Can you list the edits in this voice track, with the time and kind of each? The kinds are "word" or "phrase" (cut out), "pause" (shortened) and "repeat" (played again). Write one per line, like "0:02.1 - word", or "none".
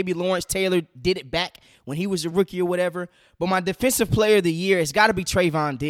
none